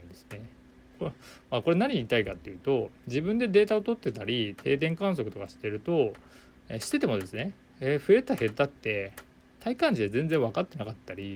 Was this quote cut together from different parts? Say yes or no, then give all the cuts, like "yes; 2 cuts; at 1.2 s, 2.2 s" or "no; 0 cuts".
no; 0 cuts